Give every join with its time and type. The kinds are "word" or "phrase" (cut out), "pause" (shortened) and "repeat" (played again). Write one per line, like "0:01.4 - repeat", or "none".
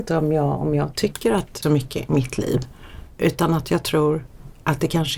0:01.6 - phrase